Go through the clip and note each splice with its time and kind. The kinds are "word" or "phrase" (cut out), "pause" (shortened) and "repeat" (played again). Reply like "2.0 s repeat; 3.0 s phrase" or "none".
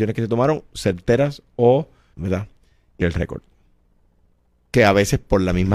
2.1 s word; 3.0 s phrase